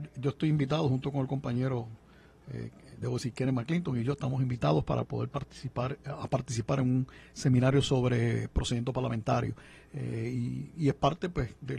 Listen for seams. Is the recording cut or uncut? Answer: uncut